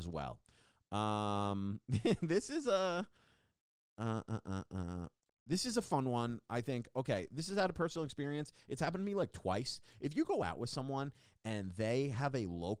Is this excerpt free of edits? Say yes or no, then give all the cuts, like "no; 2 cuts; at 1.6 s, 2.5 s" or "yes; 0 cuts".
yes; 0 cuts